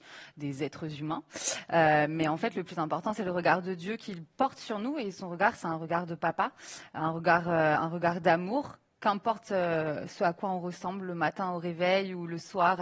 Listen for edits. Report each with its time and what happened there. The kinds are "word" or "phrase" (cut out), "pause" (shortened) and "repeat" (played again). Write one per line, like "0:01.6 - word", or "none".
none